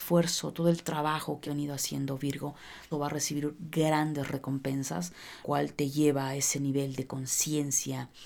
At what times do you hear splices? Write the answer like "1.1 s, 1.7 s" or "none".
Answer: 1.4 s, 2.9 s, 5.4 s